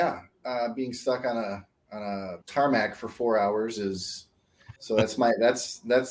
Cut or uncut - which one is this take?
cut